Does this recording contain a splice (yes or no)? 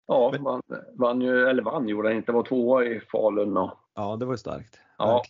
yes